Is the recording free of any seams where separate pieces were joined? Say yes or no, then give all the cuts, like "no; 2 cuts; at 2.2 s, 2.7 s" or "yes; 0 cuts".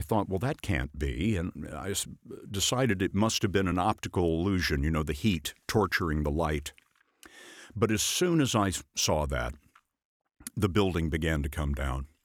yes; 0 cuts